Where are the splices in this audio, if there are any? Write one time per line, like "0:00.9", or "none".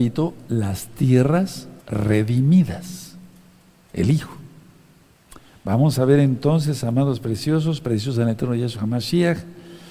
0:01.8